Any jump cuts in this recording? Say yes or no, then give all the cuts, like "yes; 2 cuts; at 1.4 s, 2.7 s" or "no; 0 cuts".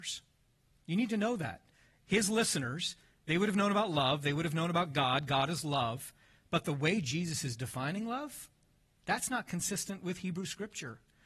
no; 0 cuts